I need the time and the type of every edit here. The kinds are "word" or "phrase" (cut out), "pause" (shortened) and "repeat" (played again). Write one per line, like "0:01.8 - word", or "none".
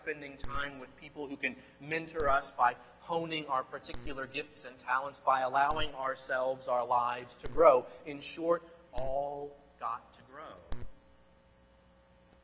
0:08.9 - word

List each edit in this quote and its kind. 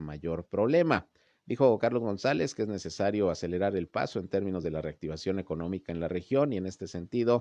none

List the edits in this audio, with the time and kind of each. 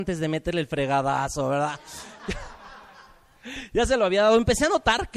none

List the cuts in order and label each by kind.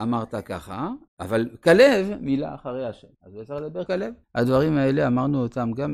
0:01.1 - pause
0:03.1 - pause
0:03.9 - word
0:04.2 - pause

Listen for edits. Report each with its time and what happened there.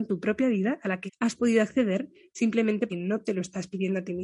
0:01.1 - word
0:02.9 - word

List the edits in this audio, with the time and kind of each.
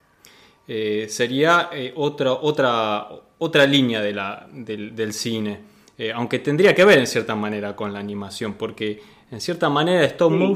none

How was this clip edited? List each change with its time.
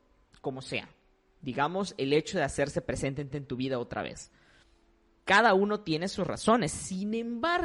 0:03.3 - repeat

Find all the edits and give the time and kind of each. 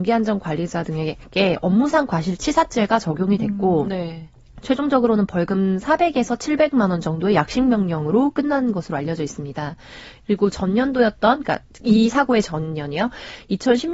none

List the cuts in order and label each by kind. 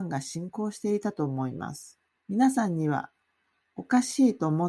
0:02.1 - pause

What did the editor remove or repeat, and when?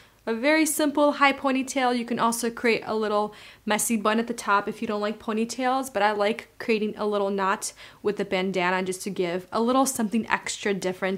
none

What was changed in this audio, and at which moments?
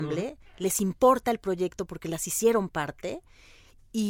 none

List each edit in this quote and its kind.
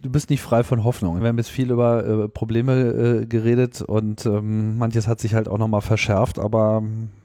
0:01.2 - word

